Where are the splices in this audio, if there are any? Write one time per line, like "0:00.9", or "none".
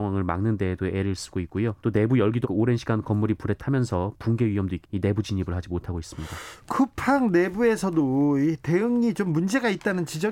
0:01.8
0:02.4
0:04.8